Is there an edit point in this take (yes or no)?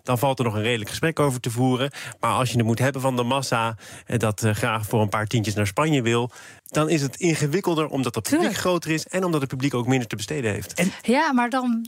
yes